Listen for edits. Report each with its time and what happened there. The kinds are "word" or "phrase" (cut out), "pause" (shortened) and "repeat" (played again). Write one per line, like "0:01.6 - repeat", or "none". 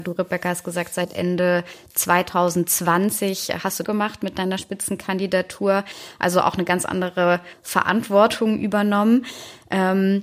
0:03.8 - phrase